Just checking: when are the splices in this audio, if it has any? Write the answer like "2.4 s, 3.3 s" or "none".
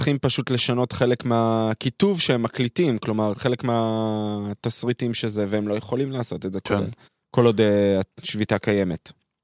7.1 s